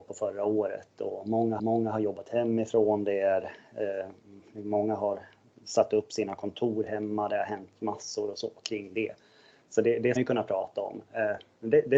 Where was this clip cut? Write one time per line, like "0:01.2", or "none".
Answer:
0:01.6
0:10.2